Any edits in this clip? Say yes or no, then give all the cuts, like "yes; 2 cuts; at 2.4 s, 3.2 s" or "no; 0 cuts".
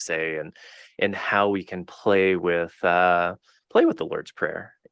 no; 0 cuts